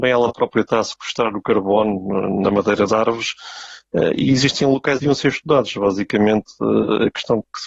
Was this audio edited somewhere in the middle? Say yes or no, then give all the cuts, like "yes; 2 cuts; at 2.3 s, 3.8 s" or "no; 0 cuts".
yes; 2 cuts; at 2.9 s, 5.0 s